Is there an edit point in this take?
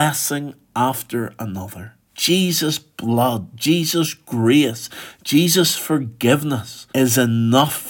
yes; 2 cuts; at 2.0 s, 6.9 s

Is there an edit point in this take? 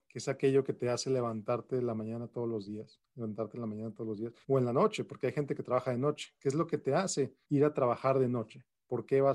yes; 2 cuts; at 4.4 s, 7.4 s

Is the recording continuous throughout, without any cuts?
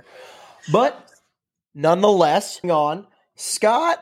no; 1 cut; at 2.6 s

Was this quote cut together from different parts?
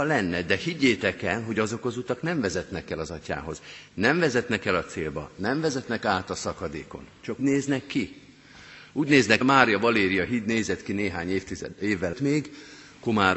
yes; 3 cuts; at 7.4 s, 9.4 s, 12.1 s

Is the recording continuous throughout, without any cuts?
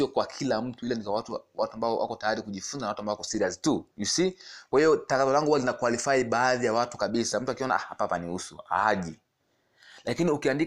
no; 1 cut; at 3.9 s

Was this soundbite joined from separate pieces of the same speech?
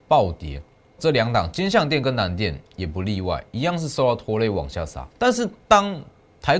yes; 2 cuts; at 1.0 s, 5.1 s

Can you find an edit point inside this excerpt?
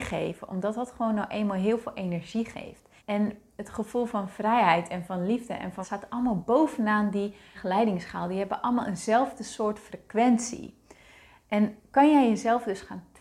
yes; 3 cuts; at 3.0 s, 5.8 s, 7.5 s

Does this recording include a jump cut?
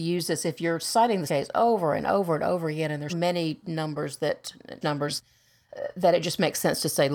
yes; 3 cuts; at 1.3 s, 3.1 s, 4.8 s

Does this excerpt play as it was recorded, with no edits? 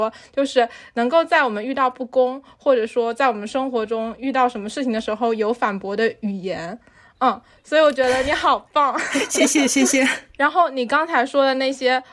yes; 0 cuts

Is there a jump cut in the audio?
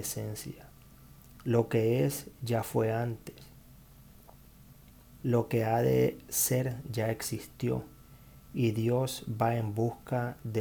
no; 0 cuts

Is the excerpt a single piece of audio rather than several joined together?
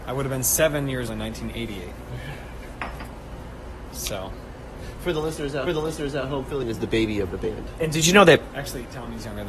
no; 3 cuts; at 1.1 s, 5.7 s, 6.6 s

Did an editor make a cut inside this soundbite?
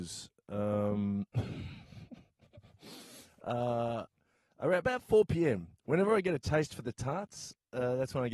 no; 0 cuts

